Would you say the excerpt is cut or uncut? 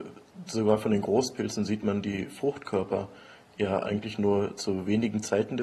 uncut